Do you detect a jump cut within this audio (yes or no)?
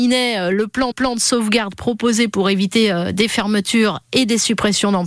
yes